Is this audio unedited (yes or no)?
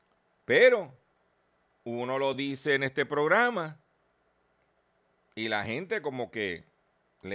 yes